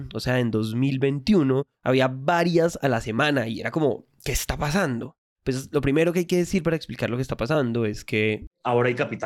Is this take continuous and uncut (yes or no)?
yes